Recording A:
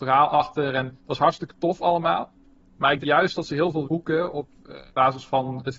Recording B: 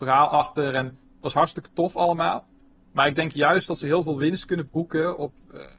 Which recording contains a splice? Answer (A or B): A